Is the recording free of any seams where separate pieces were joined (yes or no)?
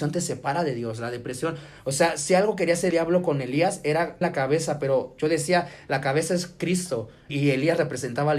no